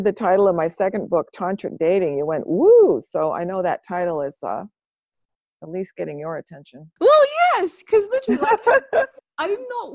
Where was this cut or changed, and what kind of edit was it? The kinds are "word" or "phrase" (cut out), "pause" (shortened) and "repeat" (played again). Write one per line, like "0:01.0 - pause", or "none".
0:07.0 - pause

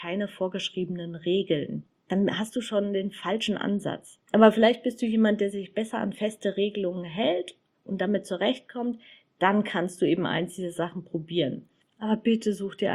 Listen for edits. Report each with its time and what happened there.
none

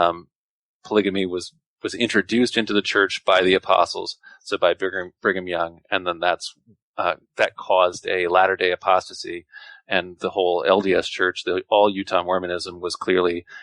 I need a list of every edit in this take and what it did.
none

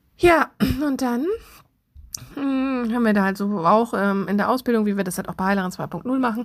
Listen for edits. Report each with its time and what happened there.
none

